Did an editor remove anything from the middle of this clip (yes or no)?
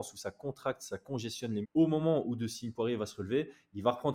yes